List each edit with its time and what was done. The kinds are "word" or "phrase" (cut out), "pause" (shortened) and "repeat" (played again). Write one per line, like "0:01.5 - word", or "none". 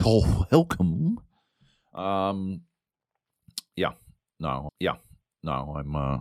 0:04.7 - repeat